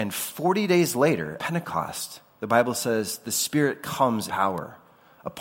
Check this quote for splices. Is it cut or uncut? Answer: cut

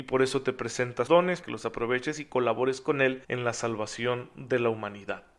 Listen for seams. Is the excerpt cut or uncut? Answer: cut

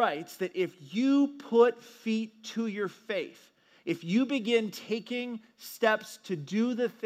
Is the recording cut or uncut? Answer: uncut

